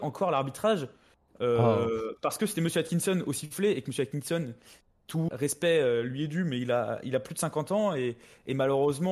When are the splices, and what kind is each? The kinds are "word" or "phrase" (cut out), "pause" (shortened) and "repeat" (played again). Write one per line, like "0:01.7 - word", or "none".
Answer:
0:05.3 - word